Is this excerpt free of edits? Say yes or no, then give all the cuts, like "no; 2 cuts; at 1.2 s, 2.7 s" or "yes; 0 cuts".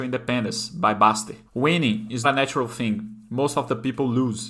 no; 2 cuts; at 1.5 s, 2.2 s